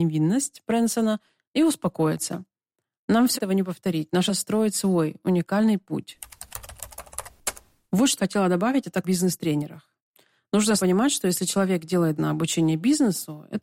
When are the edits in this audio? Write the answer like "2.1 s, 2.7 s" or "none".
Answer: 3.3 s, 4.3 s, 8.2 s, 9.0 s, 10.8 s, 12.2 s